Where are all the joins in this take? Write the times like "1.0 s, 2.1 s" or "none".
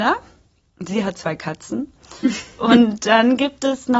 none